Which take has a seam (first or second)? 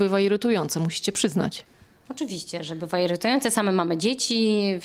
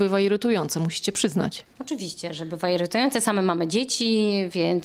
second